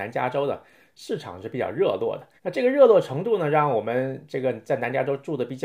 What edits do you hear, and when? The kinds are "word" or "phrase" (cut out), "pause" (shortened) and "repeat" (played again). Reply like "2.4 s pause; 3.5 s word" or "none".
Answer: 2.4 s pause